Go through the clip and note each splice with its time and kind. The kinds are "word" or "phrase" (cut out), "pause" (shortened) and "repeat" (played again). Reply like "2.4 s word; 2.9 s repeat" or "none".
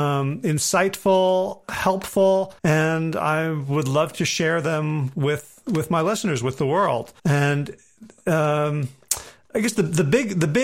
2.6 s pause; 7.2 s pause